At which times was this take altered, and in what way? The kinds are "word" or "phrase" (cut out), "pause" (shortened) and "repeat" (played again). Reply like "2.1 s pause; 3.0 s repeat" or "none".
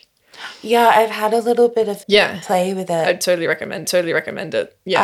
2.0 s word; 3.8 s repeat